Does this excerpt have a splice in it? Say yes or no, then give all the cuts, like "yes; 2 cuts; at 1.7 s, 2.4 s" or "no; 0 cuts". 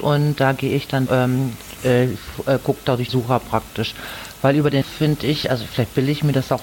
yes; 3 cuts; at 1.1 s, 3.1 s, 4.8 s